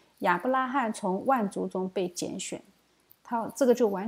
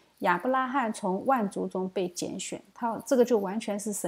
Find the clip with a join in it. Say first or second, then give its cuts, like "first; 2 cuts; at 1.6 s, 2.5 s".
second; 1 cut; at 2.7 s